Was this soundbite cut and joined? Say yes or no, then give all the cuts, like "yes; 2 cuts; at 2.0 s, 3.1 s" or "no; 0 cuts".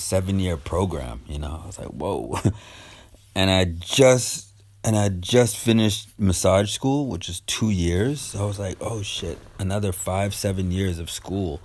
no; 0 cuts